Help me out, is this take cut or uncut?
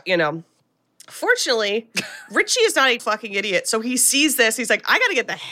cut